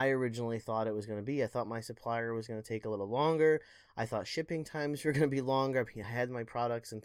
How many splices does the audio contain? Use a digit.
0